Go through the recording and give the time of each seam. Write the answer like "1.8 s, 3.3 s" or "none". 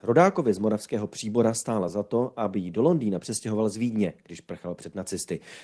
none